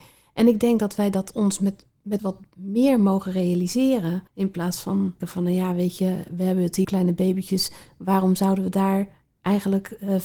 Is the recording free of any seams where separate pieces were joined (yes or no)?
no